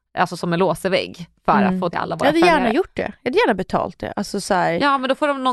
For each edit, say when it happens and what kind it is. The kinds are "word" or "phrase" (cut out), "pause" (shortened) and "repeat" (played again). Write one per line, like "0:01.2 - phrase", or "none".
0:01.9 - phrase